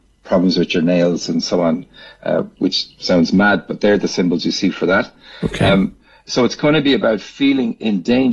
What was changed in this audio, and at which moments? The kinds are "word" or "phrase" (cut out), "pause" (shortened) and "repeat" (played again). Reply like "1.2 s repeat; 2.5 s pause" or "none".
none

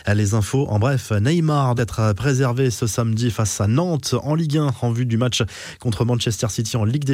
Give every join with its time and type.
1.8 s word

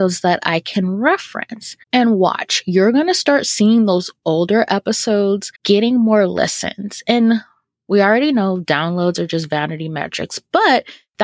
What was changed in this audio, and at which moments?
1.8 s pause; 5.5 s pause

